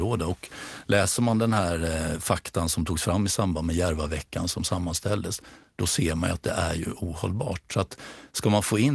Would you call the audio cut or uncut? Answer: uncut